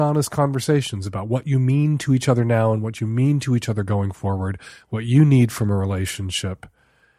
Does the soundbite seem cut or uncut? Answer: uncut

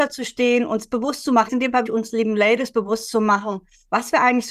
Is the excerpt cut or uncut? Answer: cut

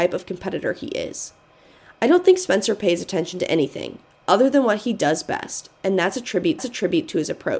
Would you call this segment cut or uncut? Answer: cut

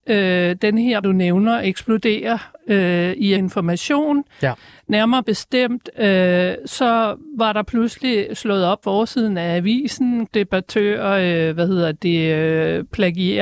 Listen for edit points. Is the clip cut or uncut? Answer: cut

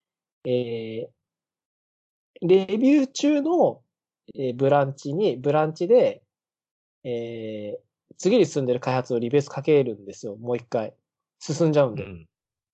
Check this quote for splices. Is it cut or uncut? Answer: uncut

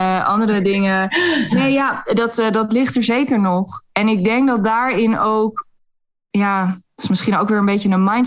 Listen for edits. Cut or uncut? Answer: uncut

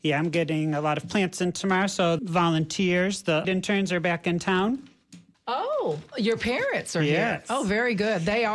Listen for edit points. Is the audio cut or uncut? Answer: cut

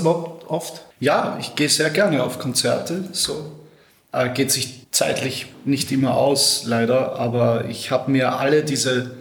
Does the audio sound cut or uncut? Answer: cut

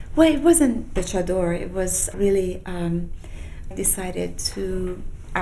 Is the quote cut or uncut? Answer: cut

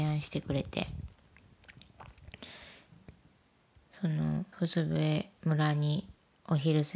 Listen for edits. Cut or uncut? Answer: cut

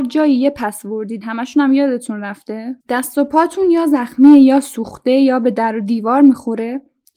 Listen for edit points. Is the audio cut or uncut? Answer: cut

